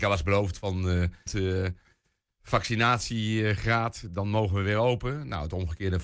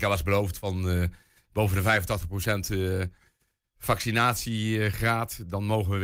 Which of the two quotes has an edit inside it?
first; 1 cut; at 1.3 s

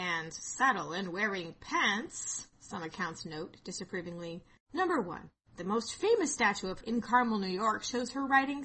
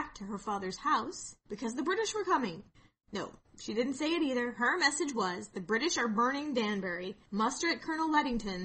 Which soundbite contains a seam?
first; 1 cut; at 6.8 s

